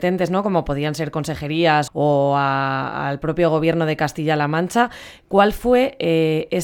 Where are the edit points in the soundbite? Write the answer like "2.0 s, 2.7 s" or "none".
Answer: 1.9 s

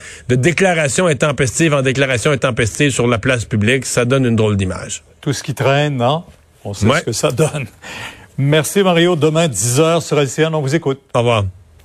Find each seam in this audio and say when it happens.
5.1 s

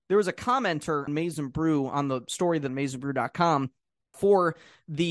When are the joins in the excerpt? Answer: 1.1 s, 2.7 s, 4.1 s

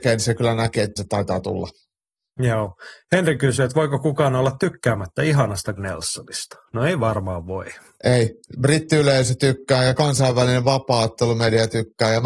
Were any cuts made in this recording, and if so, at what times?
1.0 s, 5.8 s

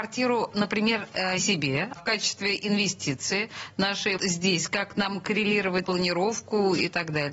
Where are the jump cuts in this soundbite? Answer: 1.4 s, 2.0 s, 4.2 s, 5.8 s

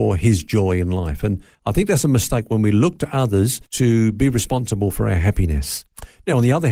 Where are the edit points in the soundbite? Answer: 3.6 s

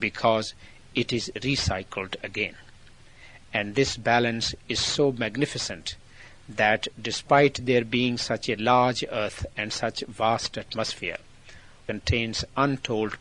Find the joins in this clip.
none

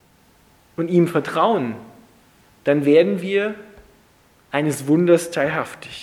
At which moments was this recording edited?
none

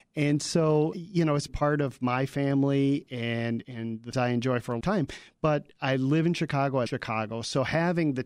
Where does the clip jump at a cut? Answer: 0.9 s, 1.5 s, 3.6 s, 4.1 s, 4.8 s, 6.9 s

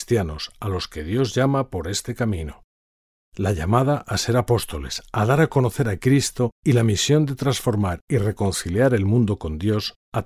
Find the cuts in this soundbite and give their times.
6.5 s

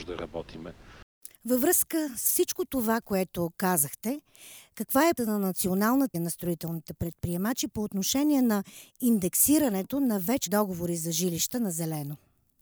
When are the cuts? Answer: 1.3 s, 5.2 s, 6.1 s, 10.5 s

